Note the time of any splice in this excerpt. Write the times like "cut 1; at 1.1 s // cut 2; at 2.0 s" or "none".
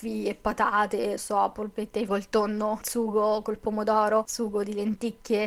cut 1; at 1.2 s // cut 2; at 2.1 s